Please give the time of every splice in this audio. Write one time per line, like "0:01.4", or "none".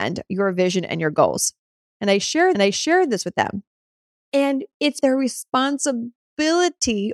0:02.5
0:05.0